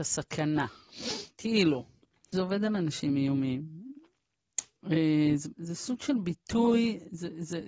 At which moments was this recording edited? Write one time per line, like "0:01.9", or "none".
0:02.3
0:05.5